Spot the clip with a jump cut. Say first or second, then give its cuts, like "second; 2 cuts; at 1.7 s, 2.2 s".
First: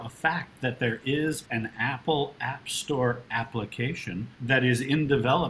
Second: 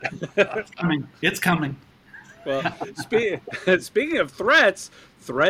first; 2 cuts; at 1.5 s, 4.3 s